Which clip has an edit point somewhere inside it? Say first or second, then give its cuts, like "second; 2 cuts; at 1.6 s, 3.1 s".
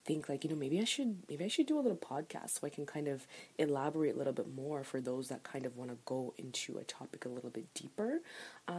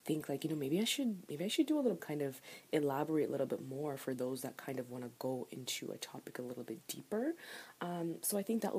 second; 1 cut; at 2.0 s